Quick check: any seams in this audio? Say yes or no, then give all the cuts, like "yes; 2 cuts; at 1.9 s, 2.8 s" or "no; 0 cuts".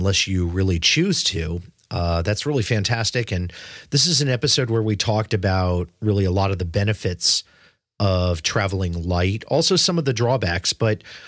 no; 0 cuts